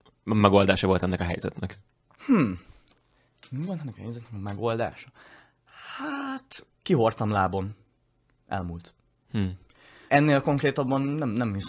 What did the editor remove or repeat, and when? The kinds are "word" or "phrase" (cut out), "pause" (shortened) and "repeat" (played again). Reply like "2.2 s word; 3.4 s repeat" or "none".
none